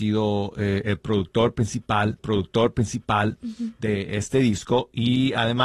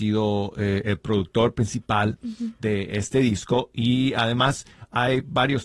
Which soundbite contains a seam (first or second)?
first